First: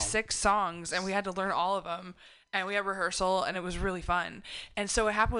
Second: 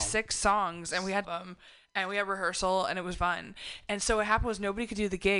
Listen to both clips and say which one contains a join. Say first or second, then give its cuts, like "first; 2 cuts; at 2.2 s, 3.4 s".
second; 2 cuts; at 1.2 s, 3.1 s